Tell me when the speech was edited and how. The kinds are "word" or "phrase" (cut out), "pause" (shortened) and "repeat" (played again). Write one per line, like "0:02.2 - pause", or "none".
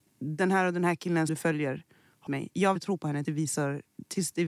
0:01.3 - word
0:02.3 - word
0:02.8 - word
0:03.2 - word